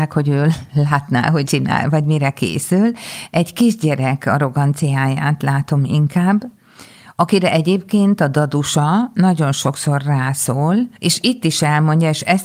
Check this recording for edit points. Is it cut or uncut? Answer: cut